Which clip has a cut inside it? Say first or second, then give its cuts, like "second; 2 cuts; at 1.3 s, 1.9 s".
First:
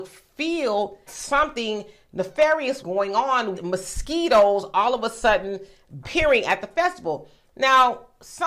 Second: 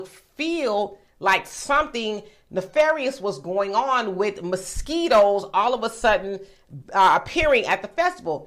first; 4 cuts; at 1.1 s, 2.8 s, 3.5 s, 6.0 s